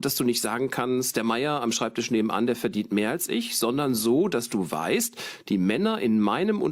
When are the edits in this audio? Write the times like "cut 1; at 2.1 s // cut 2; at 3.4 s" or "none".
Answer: none